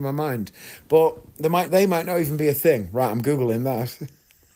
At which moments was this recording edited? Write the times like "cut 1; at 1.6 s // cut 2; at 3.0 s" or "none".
cut 1; at 1.7 s